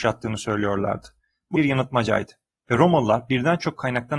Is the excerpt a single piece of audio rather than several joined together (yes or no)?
no